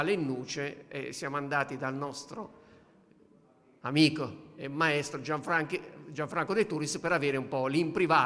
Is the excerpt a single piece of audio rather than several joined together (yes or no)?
yes